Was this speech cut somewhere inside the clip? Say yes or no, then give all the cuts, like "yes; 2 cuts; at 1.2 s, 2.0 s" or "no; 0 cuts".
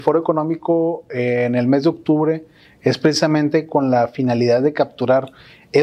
no; 0 cuts